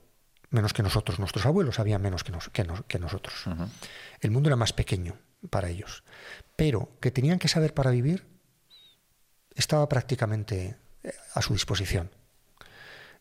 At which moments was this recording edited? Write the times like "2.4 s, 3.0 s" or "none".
7.0 s